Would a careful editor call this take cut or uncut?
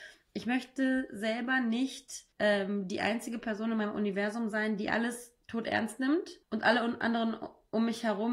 cut